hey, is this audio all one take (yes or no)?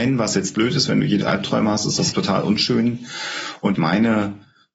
no